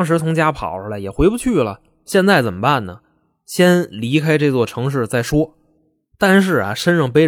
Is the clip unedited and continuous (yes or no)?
yes